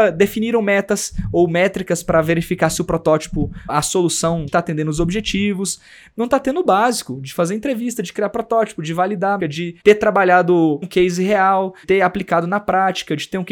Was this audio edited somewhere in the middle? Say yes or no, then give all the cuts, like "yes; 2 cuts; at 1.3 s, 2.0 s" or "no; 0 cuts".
yes; 6 cuts; at 3.7 s, 4.5 s, 9.4 s, 9.8 s, 10.8 s, 11.8 s